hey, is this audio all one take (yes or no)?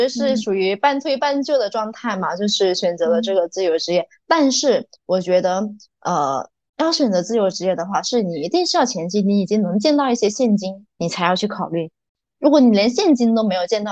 no